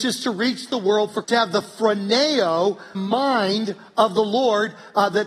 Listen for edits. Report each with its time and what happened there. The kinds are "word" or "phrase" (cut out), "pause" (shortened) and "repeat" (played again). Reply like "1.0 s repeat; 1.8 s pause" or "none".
1.2 s word; 2.9 s word

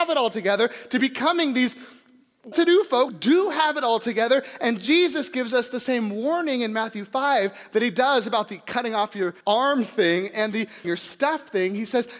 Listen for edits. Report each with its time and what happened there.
2.5 s word; 3.1 s word; 9.4 s pause; 10.8 s word

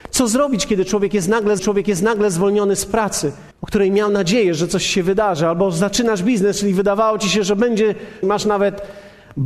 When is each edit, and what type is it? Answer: 1.6 s repeat; 3.5 s pause; 8.2 s phrase

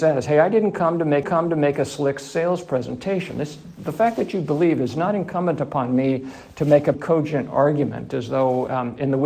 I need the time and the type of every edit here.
1.2 s repeat; 6.9 s word

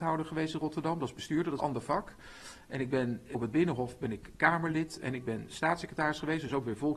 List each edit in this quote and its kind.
1.6 s phrase; 3.3 s word

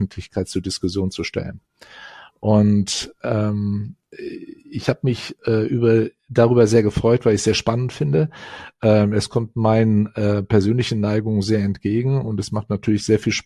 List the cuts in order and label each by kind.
6.2 s pause

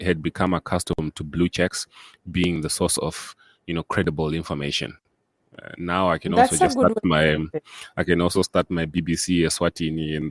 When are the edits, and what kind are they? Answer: none

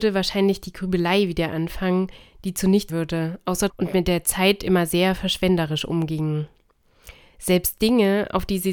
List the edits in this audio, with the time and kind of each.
2.9 s word; 3.7 s word

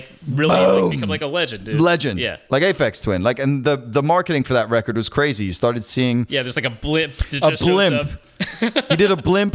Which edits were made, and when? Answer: none

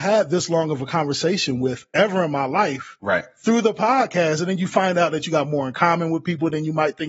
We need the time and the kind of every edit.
none

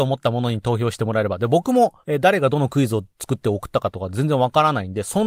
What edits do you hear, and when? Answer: 2.0 s pause

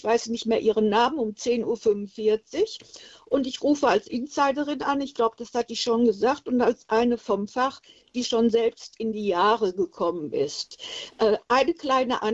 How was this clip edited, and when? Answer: none

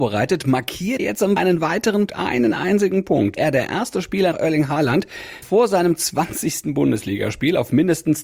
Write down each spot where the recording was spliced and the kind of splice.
1.0 s word; 1.4 s word; 2.1 s word; 3.4 s word; 4.3 s word; 5.4 s word

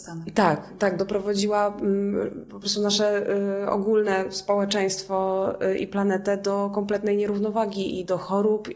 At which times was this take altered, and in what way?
none

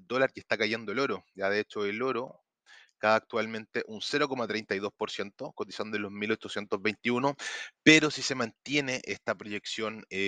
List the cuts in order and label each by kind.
none

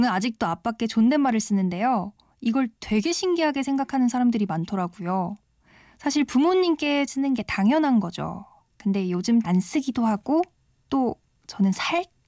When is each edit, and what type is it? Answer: 7.1 s word; 9.4 s phrase

